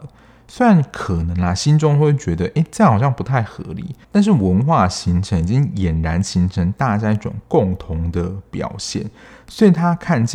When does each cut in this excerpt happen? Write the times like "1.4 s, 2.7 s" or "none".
4.0 s